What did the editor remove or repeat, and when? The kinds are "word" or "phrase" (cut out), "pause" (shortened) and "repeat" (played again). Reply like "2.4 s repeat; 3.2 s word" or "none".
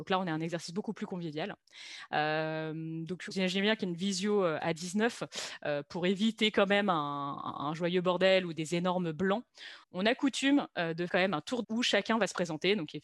3.3 s word; 9.8 s pause; 11.1 s word; 11.6 s phrase